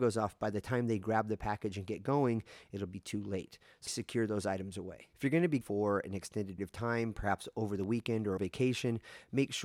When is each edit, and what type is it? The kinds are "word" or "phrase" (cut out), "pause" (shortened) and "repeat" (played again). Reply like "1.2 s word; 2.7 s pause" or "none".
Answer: 3.9 s word; 5.1 s pause; 5.6 s phrase; 6.6 s word; 8.4 s phrase